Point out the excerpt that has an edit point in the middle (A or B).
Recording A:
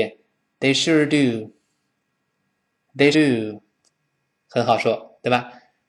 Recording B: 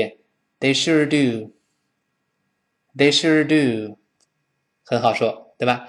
A